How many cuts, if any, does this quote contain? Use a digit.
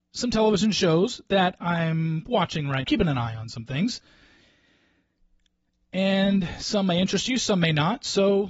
1